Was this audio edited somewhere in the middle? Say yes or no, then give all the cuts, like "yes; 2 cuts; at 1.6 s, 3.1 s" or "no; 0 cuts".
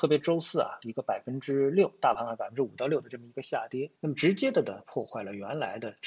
yes; 1 cut; at 4.0 s